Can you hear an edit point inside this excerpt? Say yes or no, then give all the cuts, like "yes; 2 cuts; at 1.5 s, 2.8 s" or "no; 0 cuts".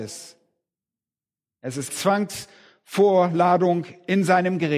yes; 1 cut; at 1.9 s